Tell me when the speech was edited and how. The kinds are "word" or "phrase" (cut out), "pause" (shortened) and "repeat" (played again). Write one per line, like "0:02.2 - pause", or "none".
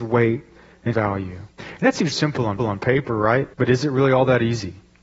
0:00.9 - word
0:01.5 - pause
0:02.1 - word
0:02.6 - repeat
0:03.5 - pause

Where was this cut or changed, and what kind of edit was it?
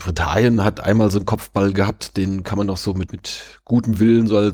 0:03.1 - word

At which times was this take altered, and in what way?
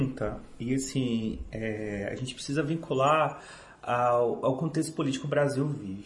none

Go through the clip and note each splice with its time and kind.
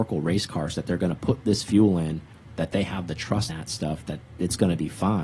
0:03.5 - word

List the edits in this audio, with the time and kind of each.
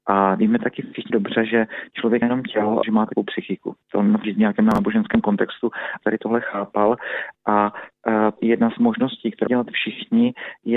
0:01.1 - word
0:02.2 - word
0:02.8 - word
0:03.2 - word
0:04.2 - word
0:06.0 - word
0:08.4 - word
0:08.8 - word
0:09.5 - word

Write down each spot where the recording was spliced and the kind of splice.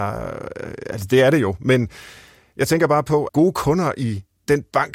0:03.3 - word

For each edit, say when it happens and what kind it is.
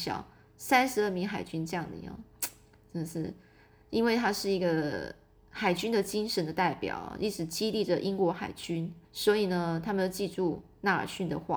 0:09.0 - pause

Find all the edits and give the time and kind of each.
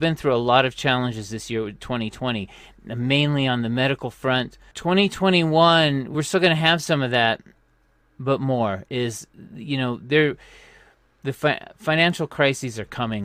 none

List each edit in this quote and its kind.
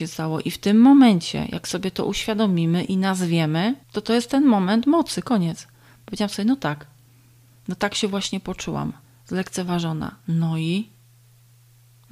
0:03.8 - pause
0:09.0 - pause

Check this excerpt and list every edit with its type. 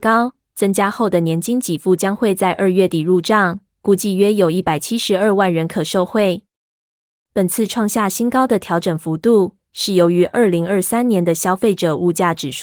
none

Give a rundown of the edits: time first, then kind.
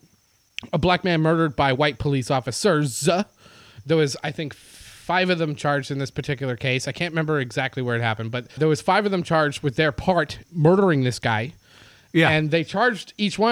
0:08.6 - word
0:10.4 - word

